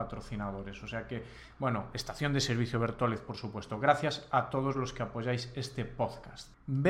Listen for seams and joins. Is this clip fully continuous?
yes; 0 cuts

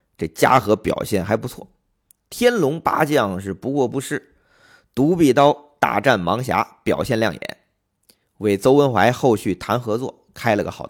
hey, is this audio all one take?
yes; 0 cuts

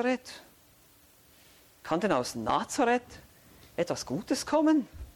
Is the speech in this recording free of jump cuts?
yes; 0 cuts

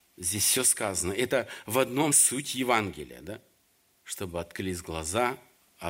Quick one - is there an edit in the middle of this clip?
yes; 2 cuts; at 2.1 s, 3.6 s

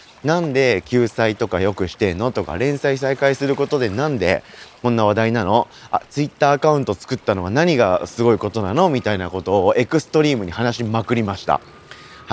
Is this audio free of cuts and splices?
yes; 0 cuts

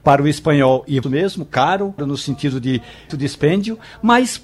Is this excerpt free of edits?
no; 3 cuts; at 1.0 s, 2.0 s, 3.1 s

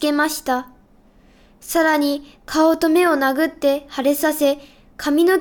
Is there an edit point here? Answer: no; 0 cuts

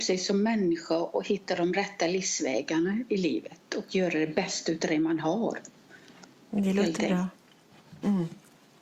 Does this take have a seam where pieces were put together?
no; 0 cuts

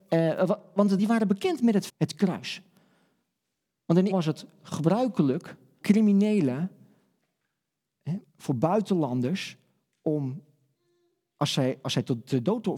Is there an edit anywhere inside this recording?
yes; 4 cuts; at 1.0 s, 1.9 s, 4.1 s, 5.8 s

